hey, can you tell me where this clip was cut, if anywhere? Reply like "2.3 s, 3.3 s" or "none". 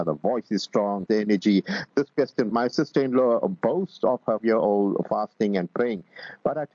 1.1 s, 2.5 s, 4.4 s